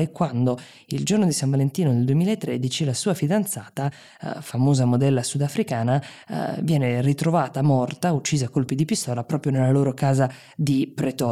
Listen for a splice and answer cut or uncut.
uncut